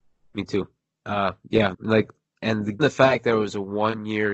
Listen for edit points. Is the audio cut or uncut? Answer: cut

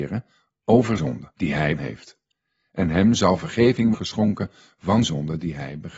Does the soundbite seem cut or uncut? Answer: cut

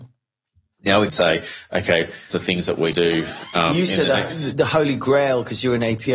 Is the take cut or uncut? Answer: cut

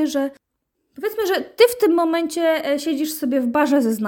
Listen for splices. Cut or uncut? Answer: uncut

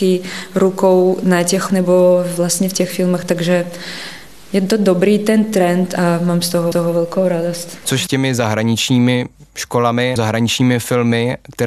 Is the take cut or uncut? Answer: cut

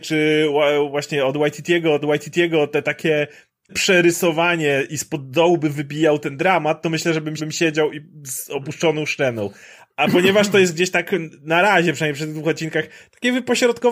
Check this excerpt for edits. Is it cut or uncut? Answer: cut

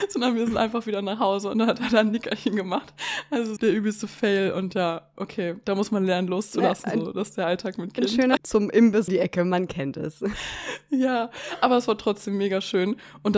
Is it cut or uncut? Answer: cut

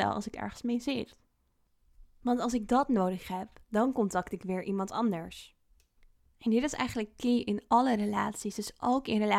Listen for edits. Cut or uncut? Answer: cut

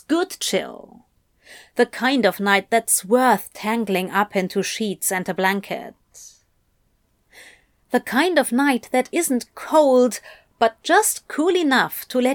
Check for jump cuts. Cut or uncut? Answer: uncut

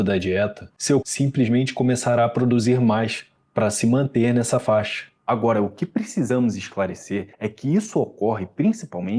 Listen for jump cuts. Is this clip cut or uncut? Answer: cut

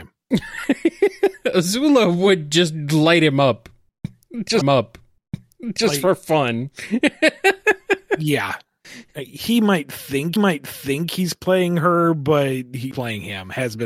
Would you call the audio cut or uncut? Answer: cut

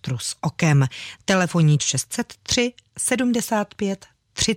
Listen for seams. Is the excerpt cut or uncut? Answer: cut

